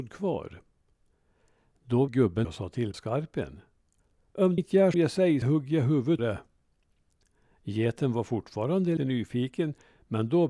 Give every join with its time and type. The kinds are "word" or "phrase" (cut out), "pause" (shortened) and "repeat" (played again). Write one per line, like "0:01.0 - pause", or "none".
0:02.1 - word
0:02.4 - word
0:02.9 - word
0:04.6 - word
0:04.9 - word
0:05.4 - word
0:06.2 - word
0:09.0 - word